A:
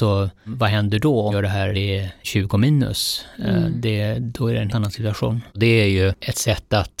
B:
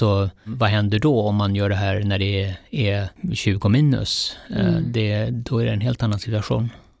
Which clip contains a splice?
A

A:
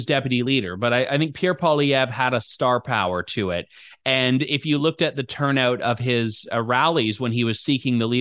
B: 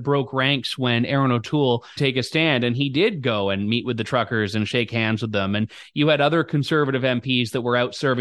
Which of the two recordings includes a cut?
B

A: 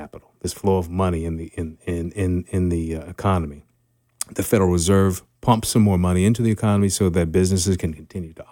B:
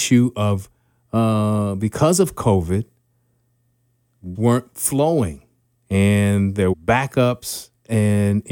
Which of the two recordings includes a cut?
B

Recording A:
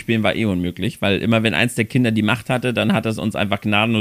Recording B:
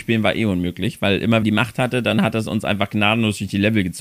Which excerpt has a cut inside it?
B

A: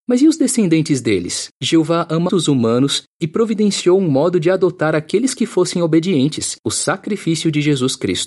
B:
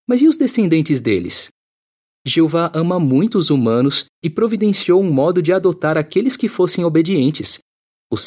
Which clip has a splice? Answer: A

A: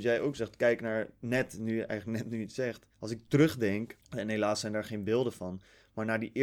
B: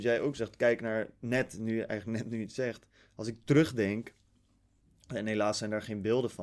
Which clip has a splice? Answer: A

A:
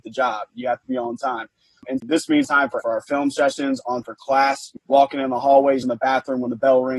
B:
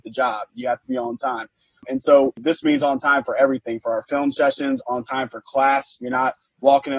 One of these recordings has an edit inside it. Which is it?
A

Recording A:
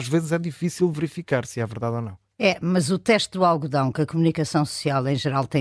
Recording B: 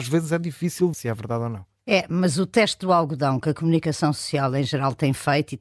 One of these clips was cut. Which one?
B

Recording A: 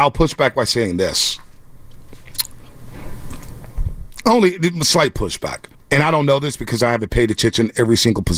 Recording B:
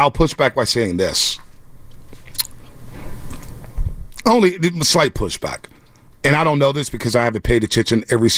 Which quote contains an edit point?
A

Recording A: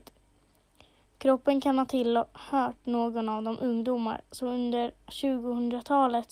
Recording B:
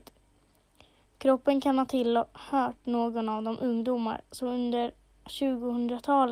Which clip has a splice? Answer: A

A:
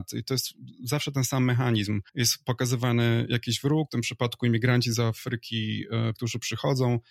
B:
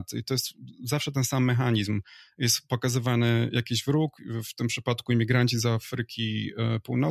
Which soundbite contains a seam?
A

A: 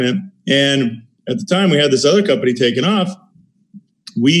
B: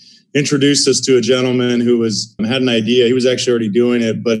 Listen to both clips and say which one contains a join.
B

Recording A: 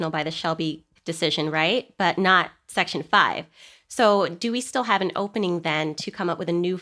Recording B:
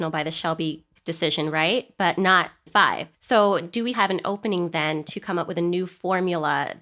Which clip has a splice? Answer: B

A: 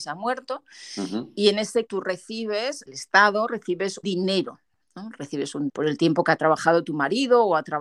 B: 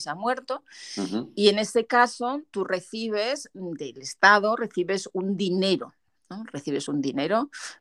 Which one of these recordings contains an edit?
A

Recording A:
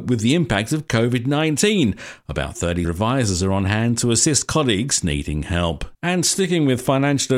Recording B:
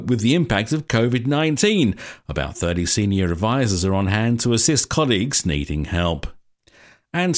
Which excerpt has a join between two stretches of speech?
A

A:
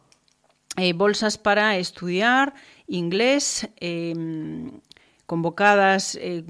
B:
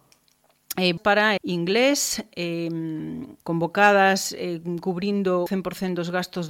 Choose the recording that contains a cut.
B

